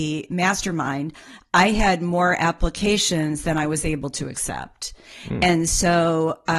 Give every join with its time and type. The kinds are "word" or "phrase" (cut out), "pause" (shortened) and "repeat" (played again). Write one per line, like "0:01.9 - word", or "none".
none

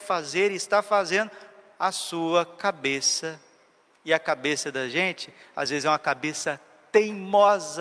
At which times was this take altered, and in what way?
none

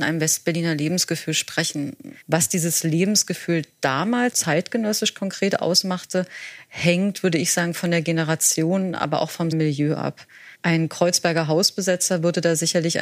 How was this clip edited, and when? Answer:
0:02.2 - pause
0:04.3 - word
0:09.5 - word
0:10.5 - pause

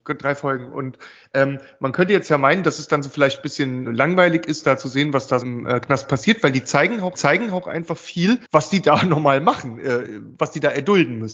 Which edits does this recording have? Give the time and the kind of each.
0:03.9 - word
0:05.4 - word
0:07.1 - repeat
0:08.4 - pause

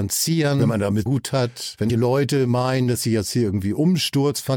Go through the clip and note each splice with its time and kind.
0:01.1 - phrase
0:01.9 - word

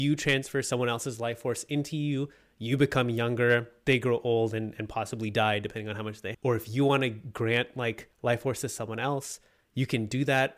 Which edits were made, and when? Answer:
0:06.3 - word
0:08.1 - pause

